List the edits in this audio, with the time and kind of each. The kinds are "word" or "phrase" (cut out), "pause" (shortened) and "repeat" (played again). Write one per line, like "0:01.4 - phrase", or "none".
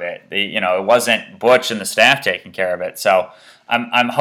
none